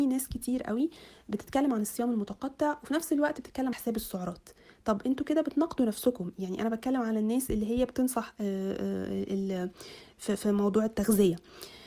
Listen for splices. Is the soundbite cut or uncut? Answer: cut